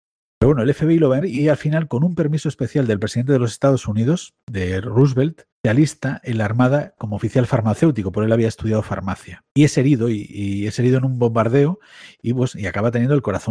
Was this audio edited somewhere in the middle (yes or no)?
yes